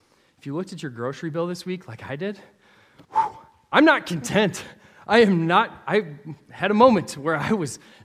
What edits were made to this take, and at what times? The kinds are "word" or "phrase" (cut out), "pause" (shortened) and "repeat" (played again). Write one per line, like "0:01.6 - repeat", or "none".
0:03.0 - pause